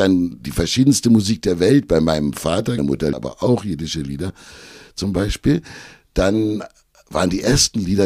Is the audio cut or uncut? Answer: cut